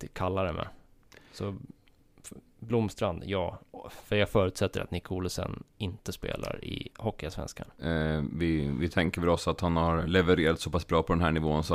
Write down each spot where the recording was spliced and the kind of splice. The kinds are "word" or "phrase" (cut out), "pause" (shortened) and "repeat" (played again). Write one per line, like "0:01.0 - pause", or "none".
0:06.9 - pause